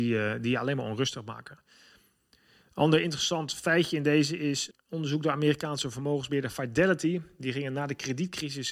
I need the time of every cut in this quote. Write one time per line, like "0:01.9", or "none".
0:04.7

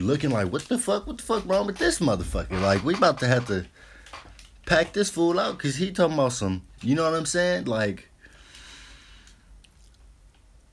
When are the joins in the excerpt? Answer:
none

